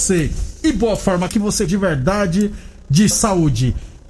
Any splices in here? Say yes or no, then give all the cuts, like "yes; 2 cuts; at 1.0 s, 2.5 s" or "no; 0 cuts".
yes; 3 cuts; at 1.3 s, 1.7 s, 3.1 s